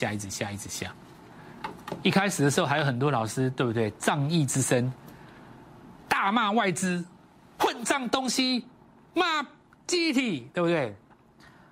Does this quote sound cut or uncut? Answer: uncut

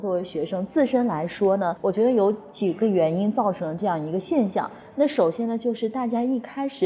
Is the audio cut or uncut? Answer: cut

